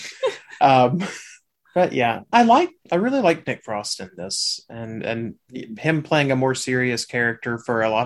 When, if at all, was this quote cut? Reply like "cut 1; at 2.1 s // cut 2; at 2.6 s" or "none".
cut 1; at 1.5 s // cut 2; at 2.3 s // cut 3; at 2.8 s

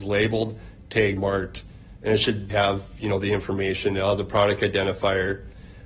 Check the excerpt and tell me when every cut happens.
cut 1; at 1.2 s // cut 2; at 2.5 s

